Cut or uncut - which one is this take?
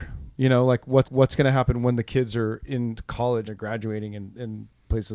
cut